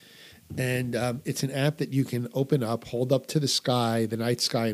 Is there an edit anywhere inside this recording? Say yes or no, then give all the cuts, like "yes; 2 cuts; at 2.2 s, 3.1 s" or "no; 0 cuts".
no; 0 cuts